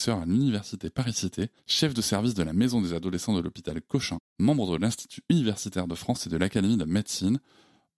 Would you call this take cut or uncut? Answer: cut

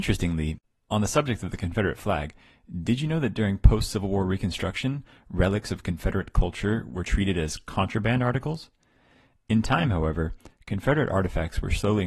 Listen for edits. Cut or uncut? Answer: uncut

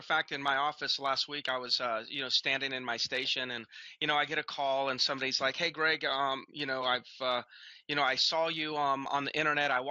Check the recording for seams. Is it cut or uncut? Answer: uncut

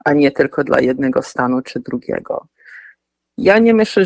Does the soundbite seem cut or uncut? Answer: uncut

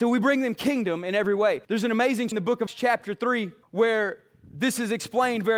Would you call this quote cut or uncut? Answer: cut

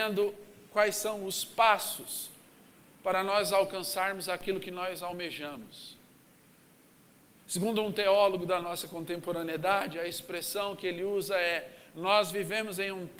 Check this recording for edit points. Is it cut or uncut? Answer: uncut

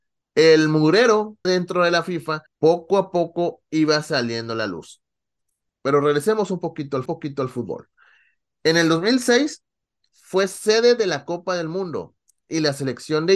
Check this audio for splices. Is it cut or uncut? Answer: cut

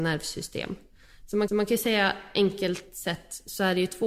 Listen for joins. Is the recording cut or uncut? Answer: cut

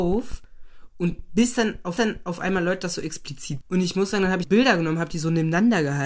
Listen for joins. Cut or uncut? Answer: cut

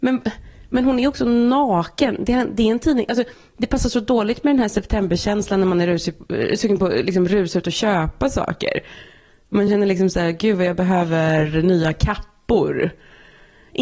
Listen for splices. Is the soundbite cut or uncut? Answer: uncut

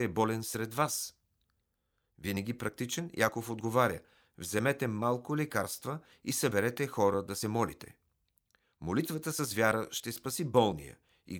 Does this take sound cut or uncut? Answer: uncut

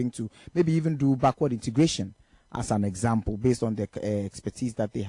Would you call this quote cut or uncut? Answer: uncut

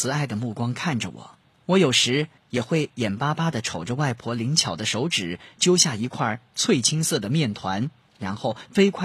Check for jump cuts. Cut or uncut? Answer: cut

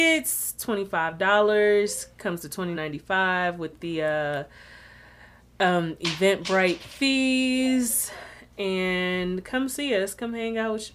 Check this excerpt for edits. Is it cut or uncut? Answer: cut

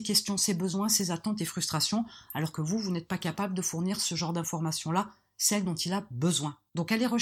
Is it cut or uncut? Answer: uncut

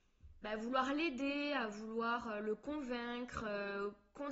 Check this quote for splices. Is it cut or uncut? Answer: uncut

